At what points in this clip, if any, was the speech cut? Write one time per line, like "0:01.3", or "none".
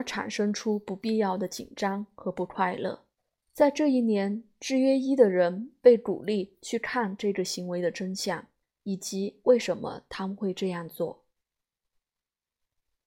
0:03.2
0:08.6